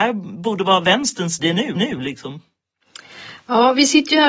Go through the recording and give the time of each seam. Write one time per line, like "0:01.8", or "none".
0:01.4
0:01.8